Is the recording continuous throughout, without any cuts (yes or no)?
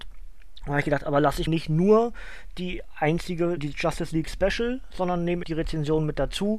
no